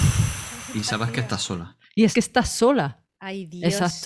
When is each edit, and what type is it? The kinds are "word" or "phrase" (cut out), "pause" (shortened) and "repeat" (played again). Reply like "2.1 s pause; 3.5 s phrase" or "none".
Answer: 2.1 s word